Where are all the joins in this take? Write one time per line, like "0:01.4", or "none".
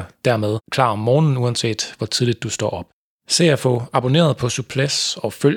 none